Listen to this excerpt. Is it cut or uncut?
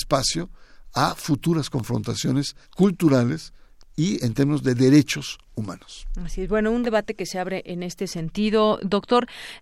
cut